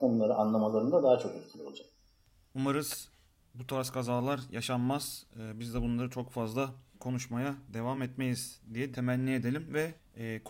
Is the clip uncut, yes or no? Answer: yes